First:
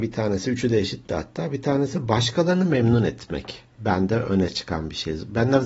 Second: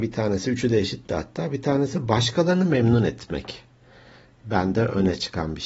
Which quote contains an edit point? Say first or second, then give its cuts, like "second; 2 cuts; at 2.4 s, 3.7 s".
first; 1 cut; at 3.7 s